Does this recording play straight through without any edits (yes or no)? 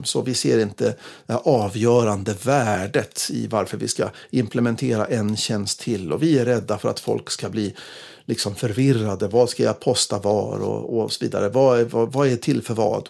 yes